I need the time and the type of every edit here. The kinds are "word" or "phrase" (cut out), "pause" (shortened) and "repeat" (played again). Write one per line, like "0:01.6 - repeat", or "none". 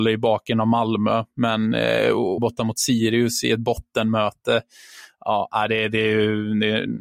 0:02.4 - phrase